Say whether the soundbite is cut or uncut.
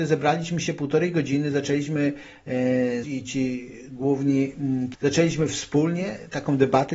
cut